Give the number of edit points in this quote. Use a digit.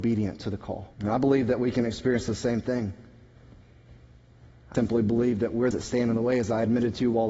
3